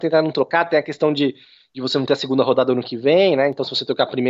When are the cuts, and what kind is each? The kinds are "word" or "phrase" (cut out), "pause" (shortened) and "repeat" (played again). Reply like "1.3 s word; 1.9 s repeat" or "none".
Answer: none

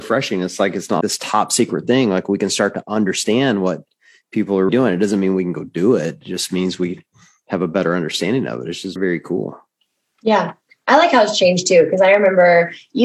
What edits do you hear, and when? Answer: 1.0 s word; 4.7 s word; 9.0 s word

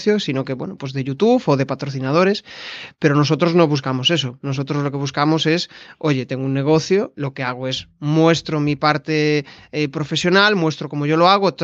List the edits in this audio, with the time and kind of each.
none

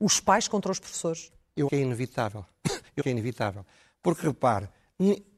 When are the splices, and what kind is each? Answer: 1.7 s word; 3.0 s word

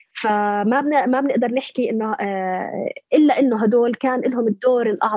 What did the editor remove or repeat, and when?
none

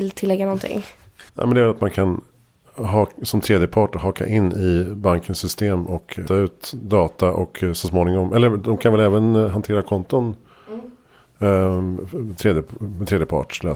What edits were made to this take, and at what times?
1.3 s pause; 6.3 s word

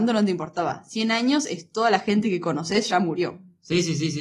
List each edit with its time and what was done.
none

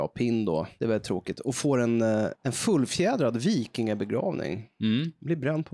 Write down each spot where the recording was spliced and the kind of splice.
none

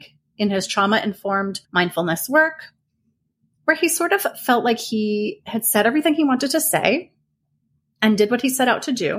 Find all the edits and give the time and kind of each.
1.6 s pause

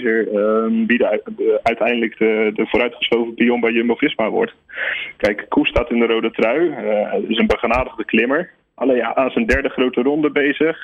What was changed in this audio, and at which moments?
none

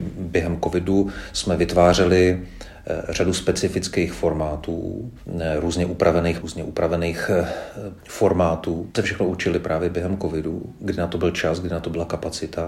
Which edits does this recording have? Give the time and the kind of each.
6.4 s word; 8.0 s word; 8.9 s word

